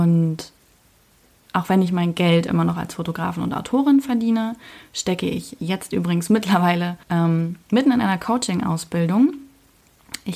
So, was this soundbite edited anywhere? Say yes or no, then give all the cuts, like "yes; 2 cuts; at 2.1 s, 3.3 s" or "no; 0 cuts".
yes; 1 cut; at 7.0 s